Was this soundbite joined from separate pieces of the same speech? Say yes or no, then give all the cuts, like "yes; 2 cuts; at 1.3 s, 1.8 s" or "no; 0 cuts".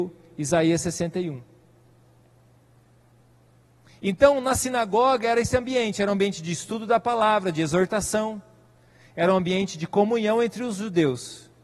no; 0 cuts